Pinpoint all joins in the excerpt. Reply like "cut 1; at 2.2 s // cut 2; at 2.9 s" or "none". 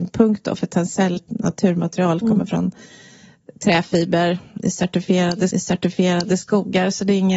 cut 1; at 1.2 s // cut 2; at 5.5 s